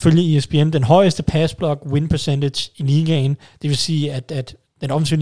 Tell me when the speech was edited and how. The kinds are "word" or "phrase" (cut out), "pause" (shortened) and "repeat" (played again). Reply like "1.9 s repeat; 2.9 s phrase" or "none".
none